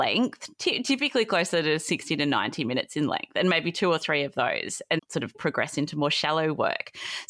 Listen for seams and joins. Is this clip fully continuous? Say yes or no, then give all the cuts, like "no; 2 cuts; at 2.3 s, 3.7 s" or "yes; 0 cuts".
no; 2 cuts; at 5.0 s, 5.3 s